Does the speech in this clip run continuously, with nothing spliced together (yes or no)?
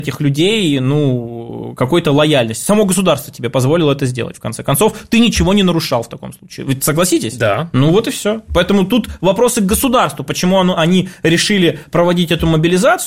yes